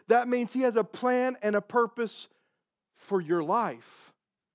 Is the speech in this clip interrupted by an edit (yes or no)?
no